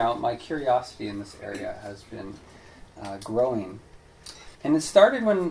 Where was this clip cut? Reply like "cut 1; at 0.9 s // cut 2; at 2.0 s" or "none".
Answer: cut 1; at 4.5 s